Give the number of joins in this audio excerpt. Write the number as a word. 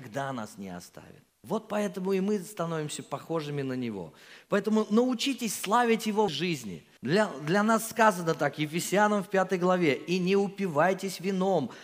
three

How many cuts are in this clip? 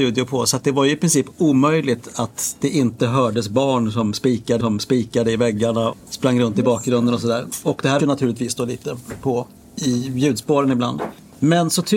four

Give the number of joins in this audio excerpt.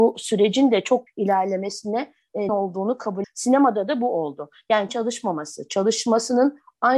four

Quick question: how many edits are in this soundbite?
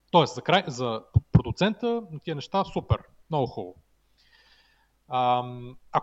zero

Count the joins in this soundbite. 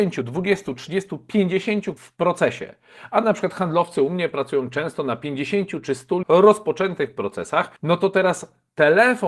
three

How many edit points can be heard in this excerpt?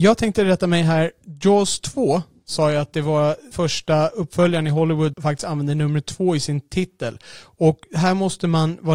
two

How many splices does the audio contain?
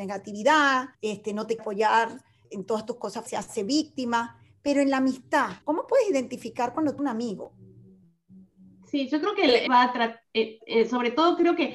seven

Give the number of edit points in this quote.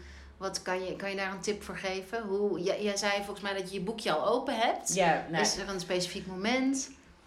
zero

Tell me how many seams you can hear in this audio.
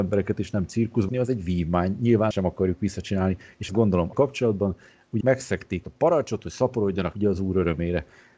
seven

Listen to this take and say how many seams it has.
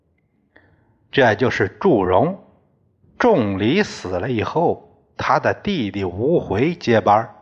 one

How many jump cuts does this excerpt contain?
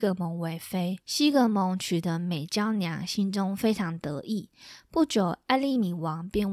one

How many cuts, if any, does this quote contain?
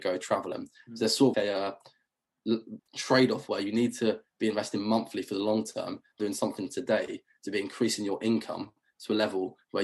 three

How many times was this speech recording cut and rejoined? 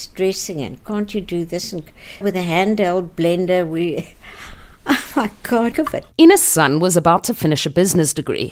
three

